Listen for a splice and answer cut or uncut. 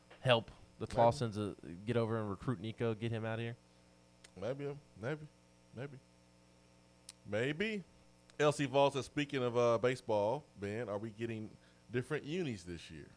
cut